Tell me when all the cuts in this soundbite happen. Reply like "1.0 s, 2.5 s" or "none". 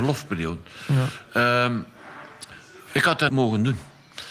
2.8 s, 3.3 s